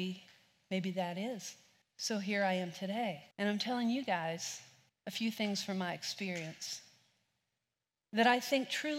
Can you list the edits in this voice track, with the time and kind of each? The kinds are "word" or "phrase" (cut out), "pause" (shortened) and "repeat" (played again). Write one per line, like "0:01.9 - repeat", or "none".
0:01.8 - pause
0:03.3 - pause
0:04.9 - pause